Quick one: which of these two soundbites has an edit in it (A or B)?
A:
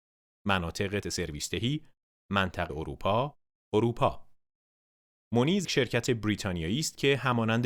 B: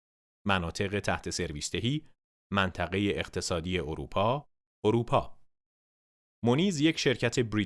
A